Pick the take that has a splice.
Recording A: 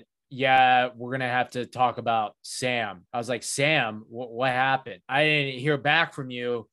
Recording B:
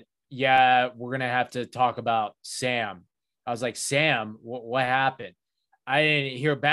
A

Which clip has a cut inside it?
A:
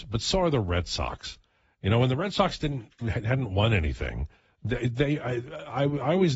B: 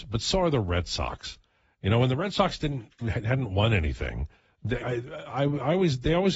B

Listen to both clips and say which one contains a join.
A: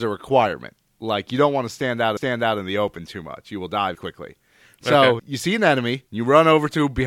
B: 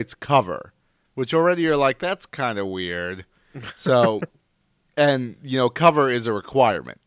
A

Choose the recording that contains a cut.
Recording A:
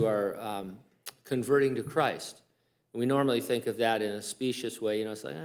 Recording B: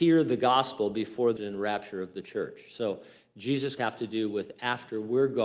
B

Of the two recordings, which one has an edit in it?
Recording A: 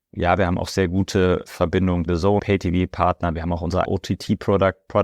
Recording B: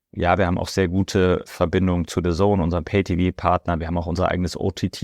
A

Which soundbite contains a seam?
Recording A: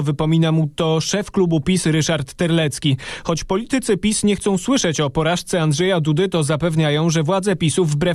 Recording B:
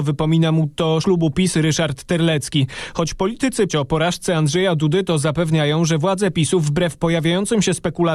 B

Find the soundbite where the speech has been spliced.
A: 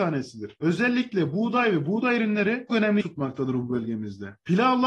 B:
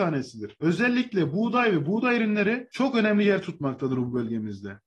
A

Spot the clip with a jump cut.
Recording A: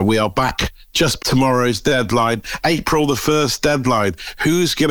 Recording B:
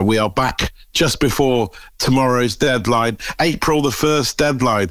A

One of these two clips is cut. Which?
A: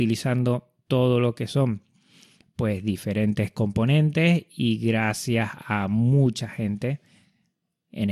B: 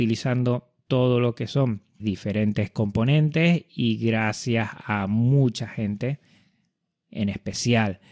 B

